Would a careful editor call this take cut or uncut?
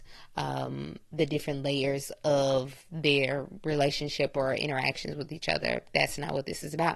uncut